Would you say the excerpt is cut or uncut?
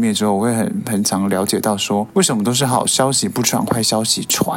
uncut